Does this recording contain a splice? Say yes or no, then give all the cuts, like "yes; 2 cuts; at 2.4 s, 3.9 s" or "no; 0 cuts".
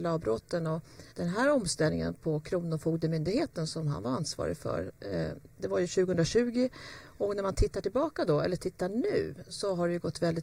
yes; 2 cuts; at 1.1 s, 5.5 s